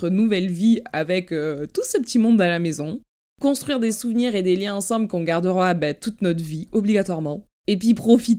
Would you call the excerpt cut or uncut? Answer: uncut